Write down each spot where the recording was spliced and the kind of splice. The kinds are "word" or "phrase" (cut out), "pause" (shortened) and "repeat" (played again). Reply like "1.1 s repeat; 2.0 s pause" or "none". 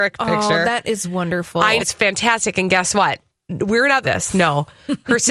1.8 s word; 3.4 s pause; 4.0 s phrase